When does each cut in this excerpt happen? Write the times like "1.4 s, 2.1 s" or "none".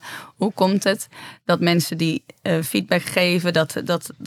none